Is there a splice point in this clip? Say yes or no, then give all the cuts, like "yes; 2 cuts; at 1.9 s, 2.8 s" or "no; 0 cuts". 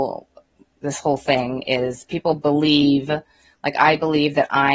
no; 0 cuts